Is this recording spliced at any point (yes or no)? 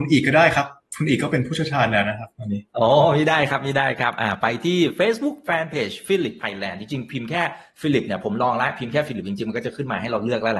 yes